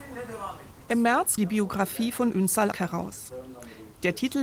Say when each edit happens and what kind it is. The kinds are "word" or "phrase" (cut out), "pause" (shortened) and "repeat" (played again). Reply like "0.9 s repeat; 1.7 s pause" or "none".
1.4 s word; 2.7 s word